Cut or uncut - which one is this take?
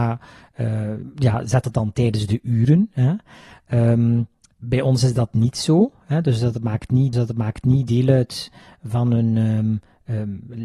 cut